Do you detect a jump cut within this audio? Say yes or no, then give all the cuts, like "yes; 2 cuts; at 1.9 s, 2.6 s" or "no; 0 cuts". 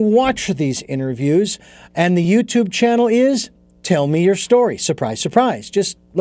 no; 0 cuts